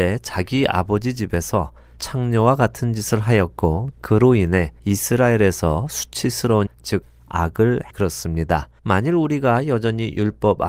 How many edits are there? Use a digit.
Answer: 5